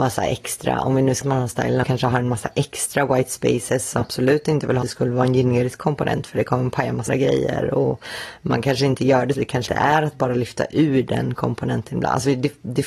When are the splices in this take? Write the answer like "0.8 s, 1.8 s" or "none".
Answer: 1.2 s, 1.8 s, 4.0 s, 4.8 s, 7.1 s, 9.3 s, 9.7 s

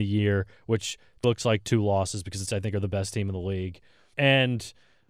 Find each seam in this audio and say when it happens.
1.2 s, 2.5 s, 4.1 s

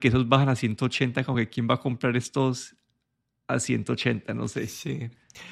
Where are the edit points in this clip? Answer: none

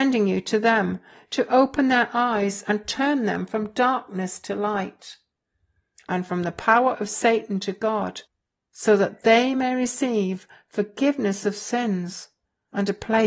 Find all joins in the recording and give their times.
none

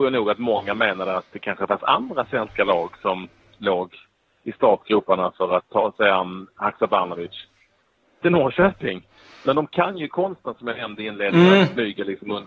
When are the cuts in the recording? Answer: 5.6 s, 8.2 s

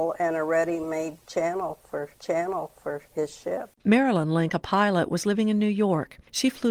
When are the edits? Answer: 2.1 s, 3.7 s

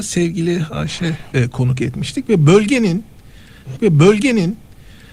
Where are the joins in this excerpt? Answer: 1.3 s, 3.8 s

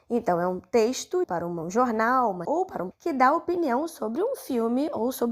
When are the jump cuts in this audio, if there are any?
1.2 s, 2.4 s, 2.9 s

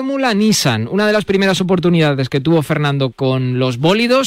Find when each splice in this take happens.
3.1 s

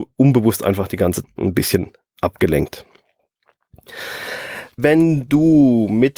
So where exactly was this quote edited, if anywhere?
1.2 s, 4.8 s

